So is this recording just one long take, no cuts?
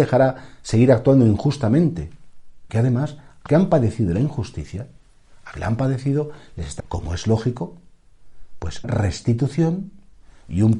no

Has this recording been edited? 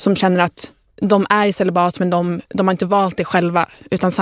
no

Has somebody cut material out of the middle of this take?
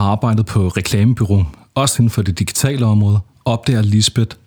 no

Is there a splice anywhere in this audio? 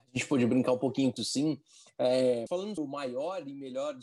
yes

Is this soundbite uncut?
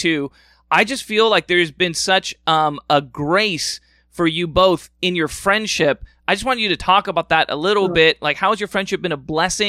yes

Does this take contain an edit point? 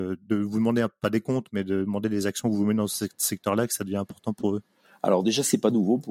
no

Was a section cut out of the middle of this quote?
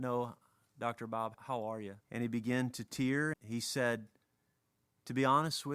yes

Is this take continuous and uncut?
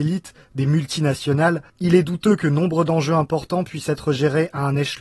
no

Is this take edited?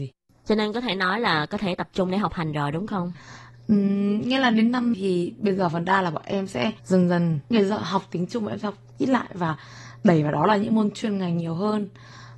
yes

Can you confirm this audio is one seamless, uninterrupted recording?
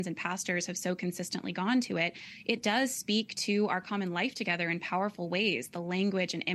yes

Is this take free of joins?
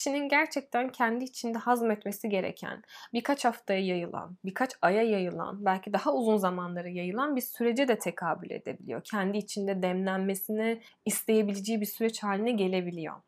yes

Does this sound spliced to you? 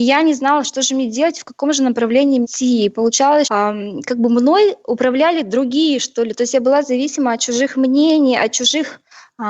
yes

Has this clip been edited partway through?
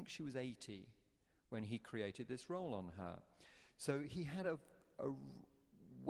no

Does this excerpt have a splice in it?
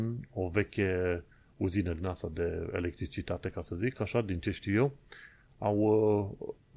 no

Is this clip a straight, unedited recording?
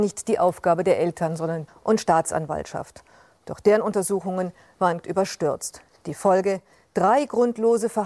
no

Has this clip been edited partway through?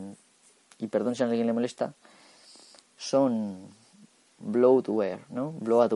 no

